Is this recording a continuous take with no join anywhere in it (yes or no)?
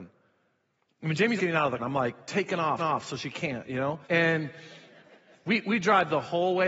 no